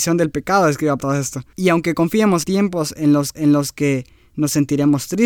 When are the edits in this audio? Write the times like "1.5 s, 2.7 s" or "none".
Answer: 1.0 s, 2.4 s, 3.3 s